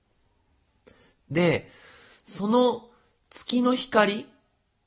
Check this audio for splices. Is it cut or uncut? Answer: uncut